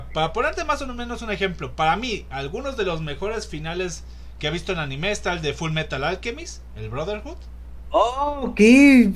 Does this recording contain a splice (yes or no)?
no